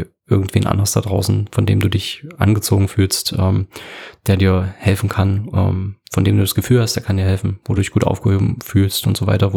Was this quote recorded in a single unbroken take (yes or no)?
yes